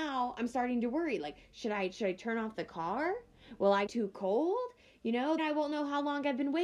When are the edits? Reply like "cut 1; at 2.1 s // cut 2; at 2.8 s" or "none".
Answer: cut 1; at 3.9 s // cut 2; at 5.4 s